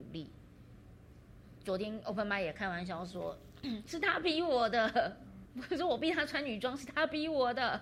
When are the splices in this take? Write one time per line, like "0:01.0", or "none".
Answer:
0:05.5